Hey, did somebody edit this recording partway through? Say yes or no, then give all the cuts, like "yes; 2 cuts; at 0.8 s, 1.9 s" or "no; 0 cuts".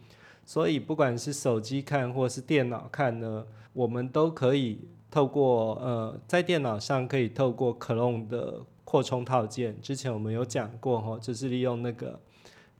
yes; 1 cut; at 3.7 s